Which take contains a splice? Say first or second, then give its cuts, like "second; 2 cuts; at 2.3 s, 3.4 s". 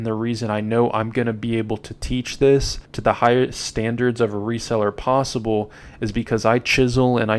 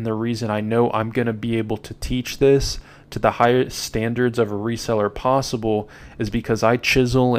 first; 1 cut; at 2.9 s